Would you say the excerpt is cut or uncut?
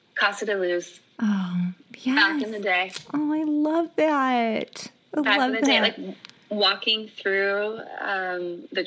uncut